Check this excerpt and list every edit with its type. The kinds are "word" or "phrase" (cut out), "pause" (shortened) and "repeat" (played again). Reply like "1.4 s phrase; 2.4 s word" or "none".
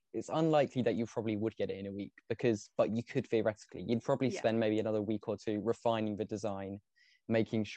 none